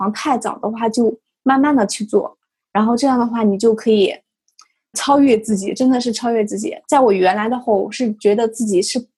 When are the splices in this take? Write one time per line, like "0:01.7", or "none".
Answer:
0:04.9